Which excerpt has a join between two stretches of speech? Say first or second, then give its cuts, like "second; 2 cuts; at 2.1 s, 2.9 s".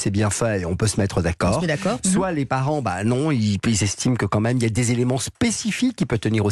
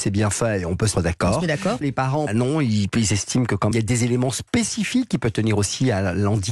second; 4 cuts; at 0.9 s, 1.8 s, 2.3 s, 3.7 s